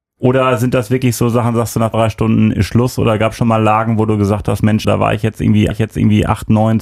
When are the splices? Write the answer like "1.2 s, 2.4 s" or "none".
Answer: 1.9 s, 4.8 s, 5.7 s